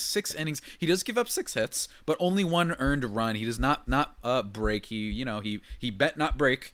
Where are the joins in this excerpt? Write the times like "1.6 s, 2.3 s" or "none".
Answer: 3.9 s